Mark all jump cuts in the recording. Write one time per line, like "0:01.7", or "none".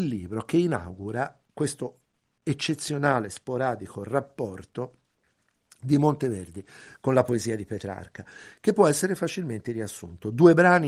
none